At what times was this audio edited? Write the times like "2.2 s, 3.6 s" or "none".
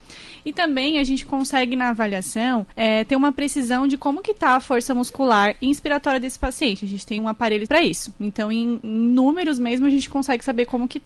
2.7 s, 7.2 s, 7.7 s